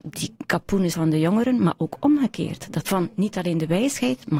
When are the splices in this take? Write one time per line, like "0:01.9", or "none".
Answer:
0:00.9
0:02.8